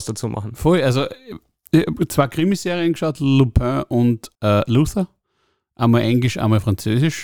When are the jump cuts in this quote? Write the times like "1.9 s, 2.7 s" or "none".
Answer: 4.3 s

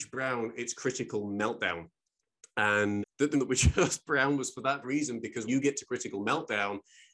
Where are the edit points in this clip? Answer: 3.0 s, 3.3 s, 4.8 s, 5.5 s

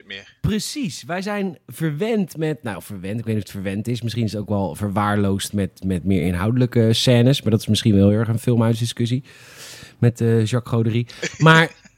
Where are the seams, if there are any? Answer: none

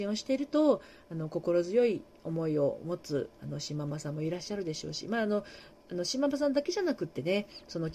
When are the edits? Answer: none

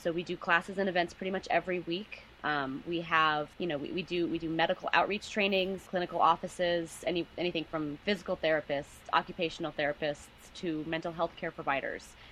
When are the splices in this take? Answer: 3.5 s, 5.9 s

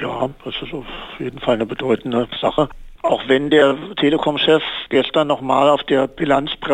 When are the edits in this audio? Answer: none

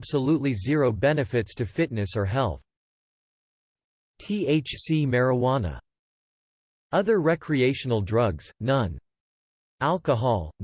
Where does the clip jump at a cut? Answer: none

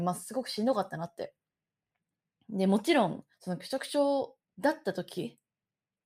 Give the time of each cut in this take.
3.3 s

